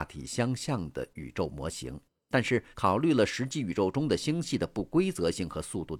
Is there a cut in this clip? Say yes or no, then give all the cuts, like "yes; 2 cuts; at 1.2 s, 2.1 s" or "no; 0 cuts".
yes; 1 cut; at 2.7 s